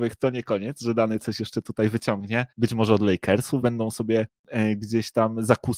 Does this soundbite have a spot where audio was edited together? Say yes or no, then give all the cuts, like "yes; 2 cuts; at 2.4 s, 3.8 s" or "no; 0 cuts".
yes; 2 cuts; at 2.5 s, 3.6 s